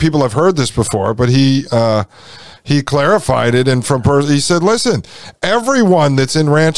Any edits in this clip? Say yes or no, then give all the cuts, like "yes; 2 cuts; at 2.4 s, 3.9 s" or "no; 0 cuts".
no; 0 cuts